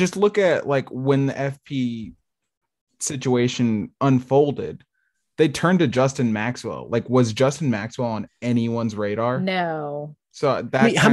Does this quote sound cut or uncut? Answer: uncut